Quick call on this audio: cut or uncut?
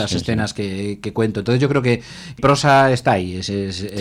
cut